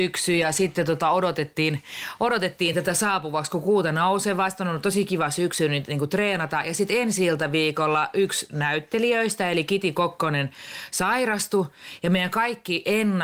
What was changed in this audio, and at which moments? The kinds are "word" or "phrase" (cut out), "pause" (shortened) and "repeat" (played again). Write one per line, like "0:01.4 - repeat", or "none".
none